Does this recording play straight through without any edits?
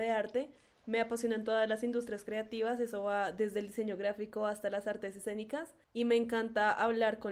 no; 1 cut; at 5.8 s

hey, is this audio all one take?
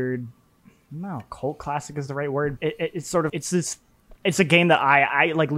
no; 3 cuts; at 2.6 s, 3.3 s, 4.2 s

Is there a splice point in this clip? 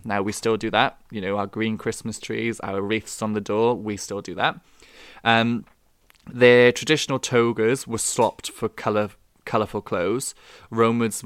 no; 0 cuts

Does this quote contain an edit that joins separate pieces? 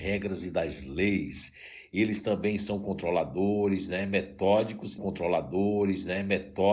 yes; 1 cut; at 5.0 s

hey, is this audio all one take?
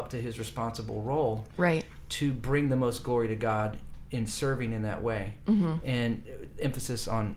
yes; 0 cuts

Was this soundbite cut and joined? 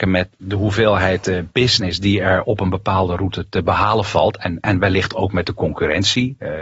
no; 0 cuts

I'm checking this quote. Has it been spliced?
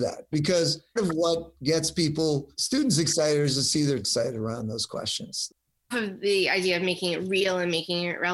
yes; 5 cuts; at 1.0 s, 1.6 s, 2.5 s, 4.0 s, 5.9 s

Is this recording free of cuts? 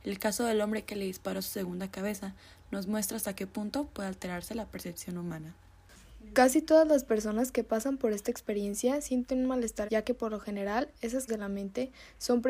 no; 2 cuts; at 9.9 s, 11.3 s

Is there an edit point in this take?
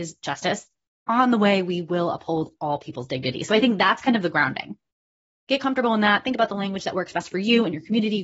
no; 0 cuts

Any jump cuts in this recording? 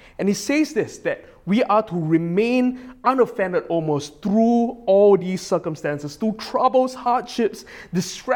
no; 0 cuts

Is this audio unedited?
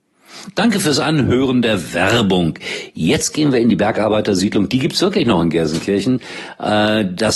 yes; 0 cuts

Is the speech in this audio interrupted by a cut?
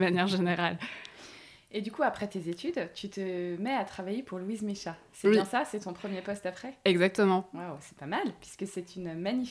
no; 0 cuts

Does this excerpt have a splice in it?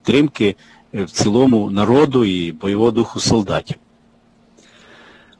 no; 0 cuts

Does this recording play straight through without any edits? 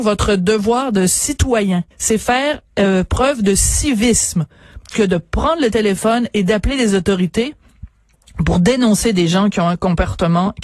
no; 1 cut; at 1.9 s

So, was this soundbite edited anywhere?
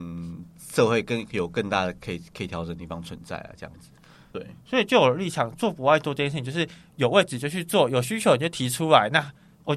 no; 0 cuts

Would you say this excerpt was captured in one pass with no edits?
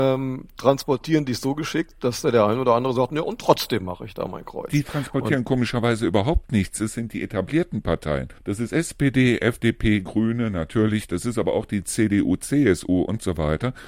no; 1 cut; at 8.4 s

